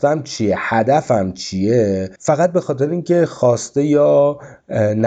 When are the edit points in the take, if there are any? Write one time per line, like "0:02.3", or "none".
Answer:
0:02.2